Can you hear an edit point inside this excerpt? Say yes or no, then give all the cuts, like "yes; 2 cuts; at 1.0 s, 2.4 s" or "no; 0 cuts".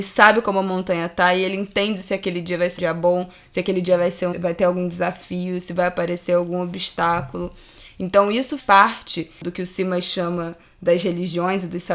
yes; 3 cuts; at 2.8 s, 4.3 s, 8.6 s